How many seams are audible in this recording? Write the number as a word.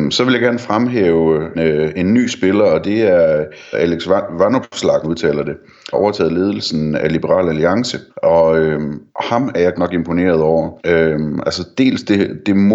eight